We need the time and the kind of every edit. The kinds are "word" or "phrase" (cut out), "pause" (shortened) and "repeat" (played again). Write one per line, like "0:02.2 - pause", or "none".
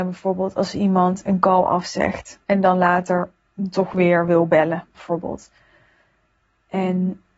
0:02.4 - pause